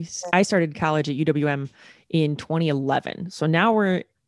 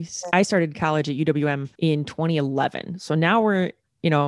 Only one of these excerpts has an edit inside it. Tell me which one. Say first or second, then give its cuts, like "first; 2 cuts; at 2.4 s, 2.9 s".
second; 1 cut; at 1.7 s